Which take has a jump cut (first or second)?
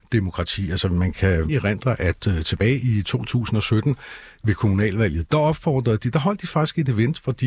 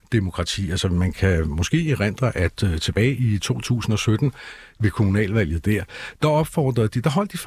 first